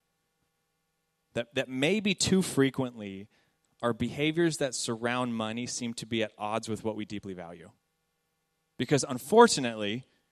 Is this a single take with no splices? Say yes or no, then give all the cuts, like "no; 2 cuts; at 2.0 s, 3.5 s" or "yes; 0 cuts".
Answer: yes; 0 cuts